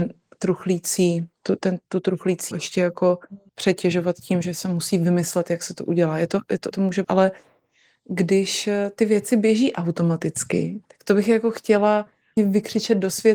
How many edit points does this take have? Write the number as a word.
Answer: six